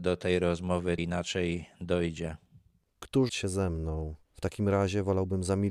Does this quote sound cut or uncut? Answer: cut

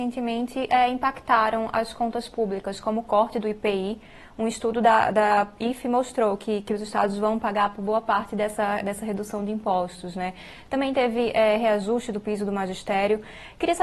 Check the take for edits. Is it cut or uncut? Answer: uncut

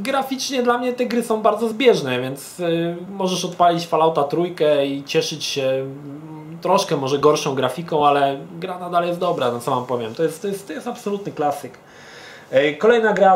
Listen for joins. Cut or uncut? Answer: uncut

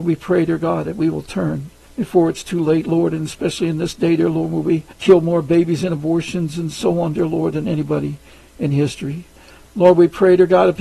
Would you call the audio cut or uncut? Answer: cut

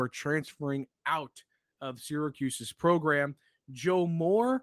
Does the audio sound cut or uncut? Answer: uncut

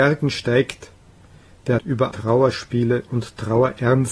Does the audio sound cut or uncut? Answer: cut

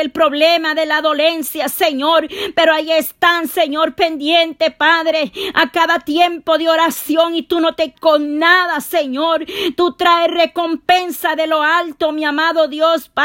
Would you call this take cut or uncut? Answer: cut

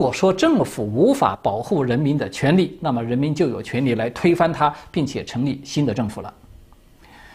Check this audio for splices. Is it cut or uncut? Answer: uncut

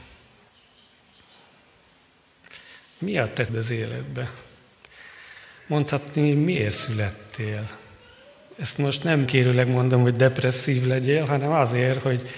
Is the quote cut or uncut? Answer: cut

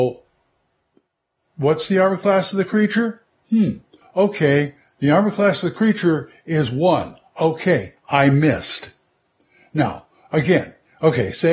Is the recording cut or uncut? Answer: uncut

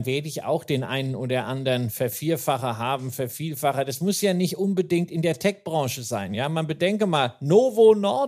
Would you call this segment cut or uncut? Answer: uncut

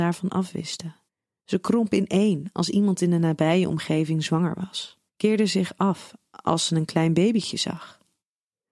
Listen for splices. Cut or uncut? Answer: cut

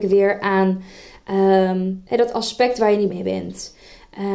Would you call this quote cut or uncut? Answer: cut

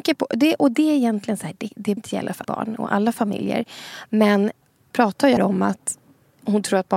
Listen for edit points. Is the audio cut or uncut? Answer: cut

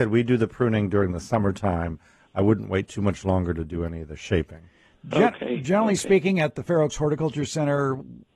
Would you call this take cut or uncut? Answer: uncut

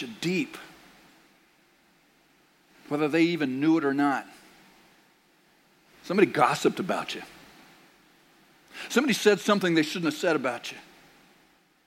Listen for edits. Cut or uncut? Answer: uncut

